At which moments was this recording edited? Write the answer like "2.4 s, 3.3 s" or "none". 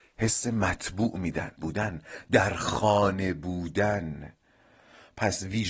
1.6 s